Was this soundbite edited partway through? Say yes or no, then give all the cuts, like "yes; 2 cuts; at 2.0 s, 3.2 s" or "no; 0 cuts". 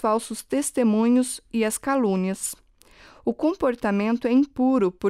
no; 0 cuts